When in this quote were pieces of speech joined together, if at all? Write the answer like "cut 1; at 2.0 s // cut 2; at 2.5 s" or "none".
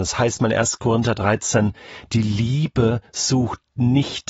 none

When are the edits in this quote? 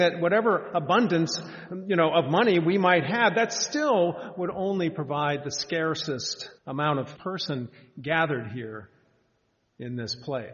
cut 1; at 6.6 s // cut 2; at 7.2 s

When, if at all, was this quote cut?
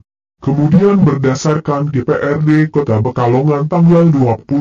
cut 1; at 1.9 s // cut 2; at 3.0 s

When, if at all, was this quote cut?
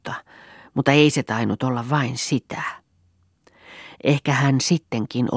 none

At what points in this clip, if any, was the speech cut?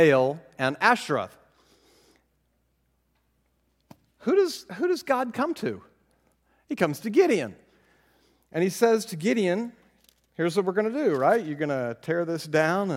none

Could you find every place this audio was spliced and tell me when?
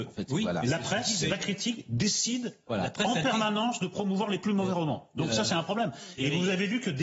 none

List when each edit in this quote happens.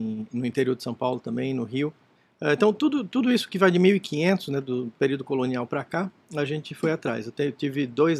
cut 1; at 2.1 s

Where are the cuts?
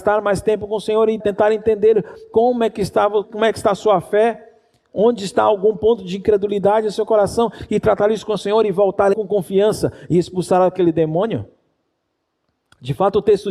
cut 1; at 1.2 s // cut 2; at 3.2 s // cut 3; at 9.1 s

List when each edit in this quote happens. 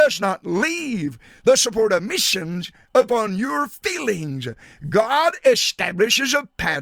none

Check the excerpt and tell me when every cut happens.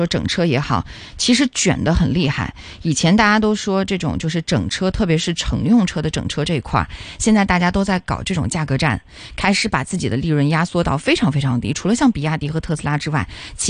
none

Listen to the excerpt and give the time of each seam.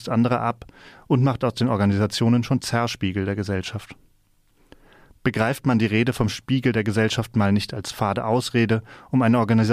none

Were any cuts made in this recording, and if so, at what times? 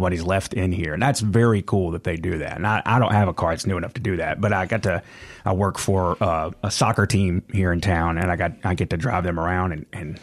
none

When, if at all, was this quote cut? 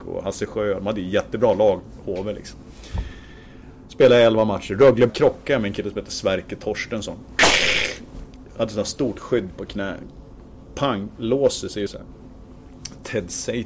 cut 1; at 5.1 s // cut 2; at 11.9 s

